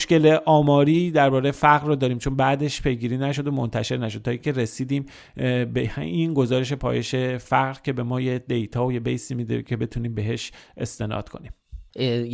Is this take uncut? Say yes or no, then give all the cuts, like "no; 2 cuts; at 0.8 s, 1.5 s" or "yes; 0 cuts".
yes; 0 cuts